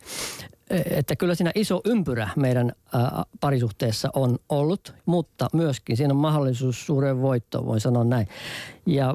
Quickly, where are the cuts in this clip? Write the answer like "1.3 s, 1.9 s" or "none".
5.0 s